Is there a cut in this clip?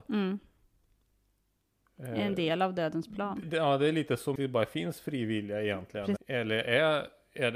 yes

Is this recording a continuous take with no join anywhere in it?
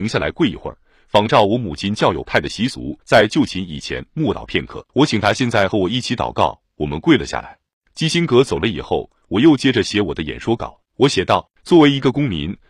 no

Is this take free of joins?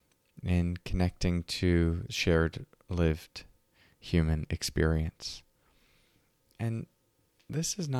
no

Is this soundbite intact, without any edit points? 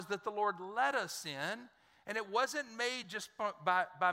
yes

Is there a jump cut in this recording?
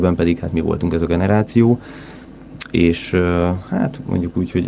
no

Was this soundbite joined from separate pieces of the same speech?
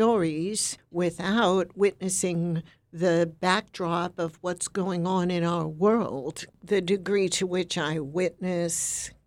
no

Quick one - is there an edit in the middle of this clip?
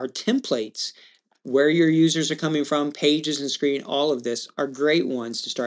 no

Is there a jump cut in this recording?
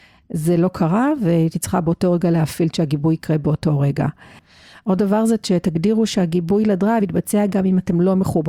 no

